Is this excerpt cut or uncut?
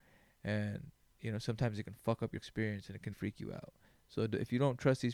cut